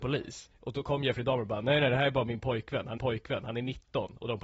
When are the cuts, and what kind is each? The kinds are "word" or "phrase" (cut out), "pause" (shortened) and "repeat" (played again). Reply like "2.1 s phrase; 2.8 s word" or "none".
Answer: 3.0 s repeat